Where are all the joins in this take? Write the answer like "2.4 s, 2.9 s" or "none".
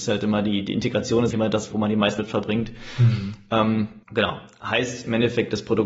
1.3 s, 1.7 s, 2.2 s, 4.0 s

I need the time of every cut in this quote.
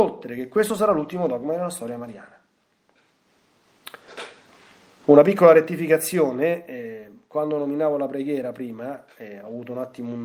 none

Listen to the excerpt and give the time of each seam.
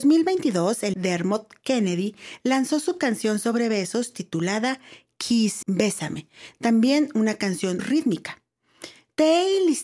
0.9 s, 5.6 s, 7.8 s

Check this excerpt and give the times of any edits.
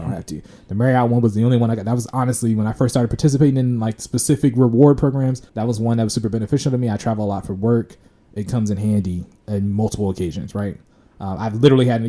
5.5 s

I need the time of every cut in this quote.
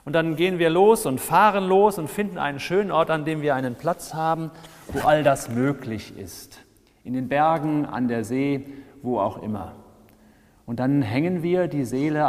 none

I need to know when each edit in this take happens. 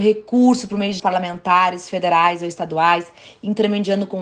1.0 s

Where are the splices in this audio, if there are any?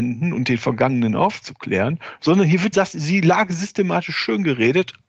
2.7 s

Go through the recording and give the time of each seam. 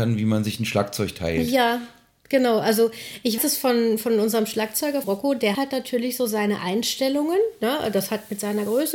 3.4 s, 5.0 s, 5.5 s

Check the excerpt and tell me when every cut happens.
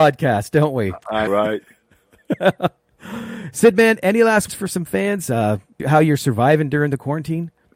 1.3 s, 4.5 s, 5.8 s

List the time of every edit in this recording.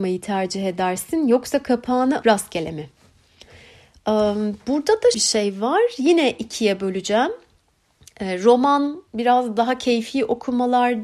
2.2 s, 5.1 s, 9.1 s

